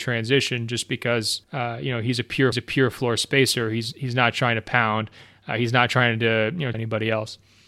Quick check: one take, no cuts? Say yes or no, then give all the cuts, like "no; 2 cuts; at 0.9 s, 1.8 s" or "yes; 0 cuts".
no; 3 cuts; at 1.4 s, 2.5 s, 6.7 s